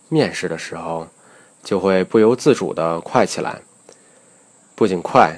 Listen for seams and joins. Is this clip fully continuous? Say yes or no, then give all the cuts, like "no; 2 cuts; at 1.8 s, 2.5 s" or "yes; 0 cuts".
yes; 0 cuts